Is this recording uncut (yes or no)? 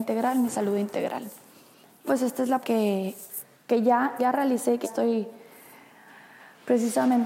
no